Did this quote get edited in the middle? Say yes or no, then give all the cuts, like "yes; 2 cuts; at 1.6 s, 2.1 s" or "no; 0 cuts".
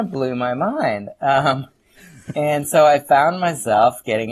no; 0 cuts